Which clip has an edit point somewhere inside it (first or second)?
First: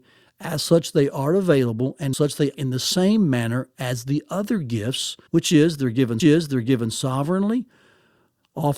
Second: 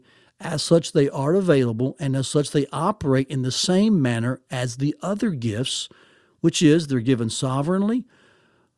first